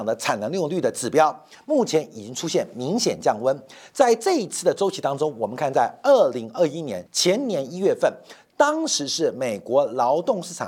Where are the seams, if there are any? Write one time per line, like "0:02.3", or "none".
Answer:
0:07.1